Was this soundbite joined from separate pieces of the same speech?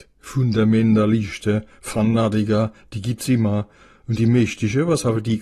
no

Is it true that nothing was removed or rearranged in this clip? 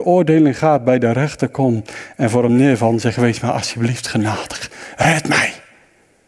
yes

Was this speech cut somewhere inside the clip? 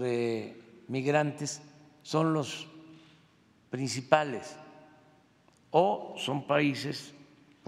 no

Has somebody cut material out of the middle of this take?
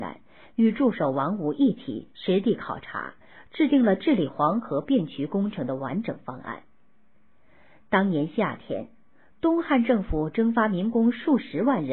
no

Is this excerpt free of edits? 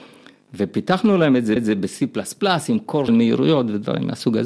no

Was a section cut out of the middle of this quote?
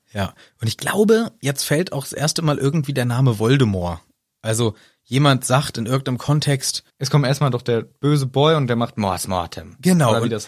no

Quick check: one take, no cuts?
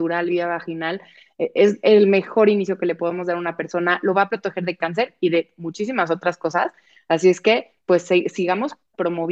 yes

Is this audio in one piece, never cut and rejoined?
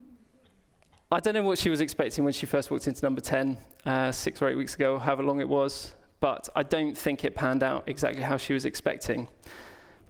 yes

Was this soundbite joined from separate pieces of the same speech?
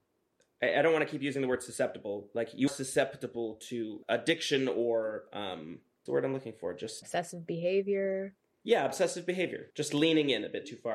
yes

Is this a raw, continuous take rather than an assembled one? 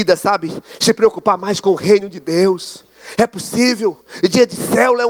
yes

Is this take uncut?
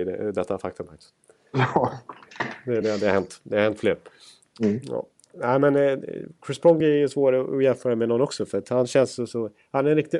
yes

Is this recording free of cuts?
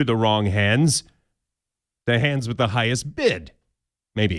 yes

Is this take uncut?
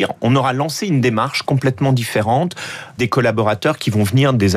no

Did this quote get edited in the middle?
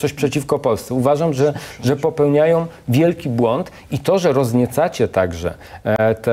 no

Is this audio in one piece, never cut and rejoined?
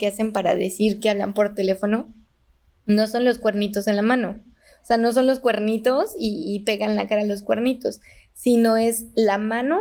yes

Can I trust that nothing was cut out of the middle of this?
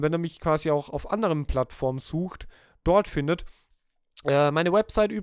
yes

